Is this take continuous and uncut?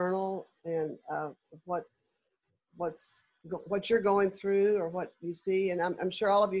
yes; 0 cuts

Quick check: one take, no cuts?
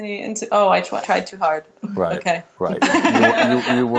no; 1 cut; at 1.0 s

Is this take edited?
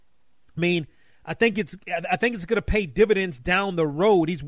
no; 0 cuts

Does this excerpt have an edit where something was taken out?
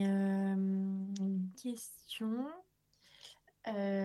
yes; 1 cut; at 1.5 s

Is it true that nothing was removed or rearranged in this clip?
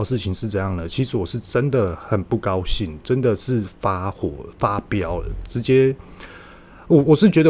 yes; 0 cuts

